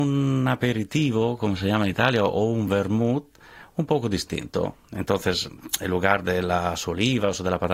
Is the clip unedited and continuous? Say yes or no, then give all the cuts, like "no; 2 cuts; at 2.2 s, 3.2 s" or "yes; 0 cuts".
yes; 0 cuts